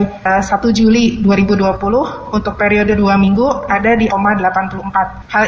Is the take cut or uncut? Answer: cut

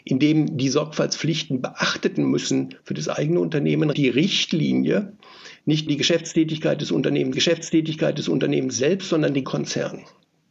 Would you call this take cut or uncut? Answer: cut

